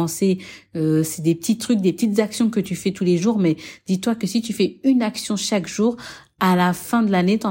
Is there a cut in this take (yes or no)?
no